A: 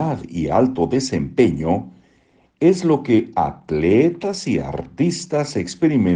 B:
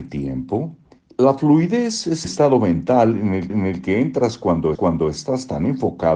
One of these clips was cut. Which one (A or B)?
B